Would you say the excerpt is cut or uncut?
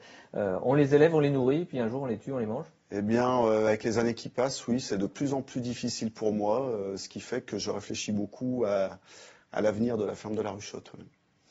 uncut